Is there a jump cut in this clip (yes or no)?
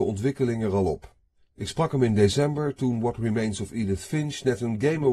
no